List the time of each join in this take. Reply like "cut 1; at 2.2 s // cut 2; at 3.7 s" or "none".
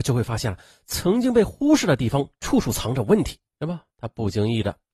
cut 1; at 3.5 s // cut 2; at 3.9 s